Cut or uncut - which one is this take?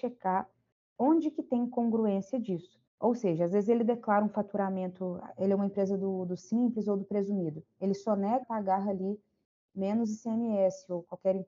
cut